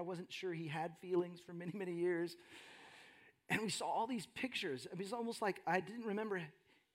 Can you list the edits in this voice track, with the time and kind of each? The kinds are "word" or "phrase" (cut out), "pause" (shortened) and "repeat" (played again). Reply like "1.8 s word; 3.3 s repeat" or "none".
none